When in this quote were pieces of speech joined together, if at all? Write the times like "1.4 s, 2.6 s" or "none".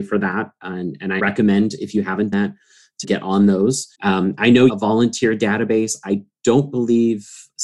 1.2 s, 2.3 s, 3.0 s, 3.9 s, 4.7 s